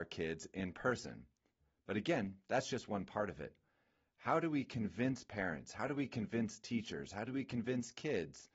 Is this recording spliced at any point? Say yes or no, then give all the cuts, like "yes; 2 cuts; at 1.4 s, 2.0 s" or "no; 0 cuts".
no; 0 cuts